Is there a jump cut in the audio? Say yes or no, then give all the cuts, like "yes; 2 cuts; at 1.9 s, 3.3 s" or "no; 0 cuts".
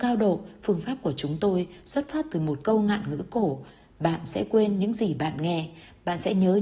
no; 0 cuts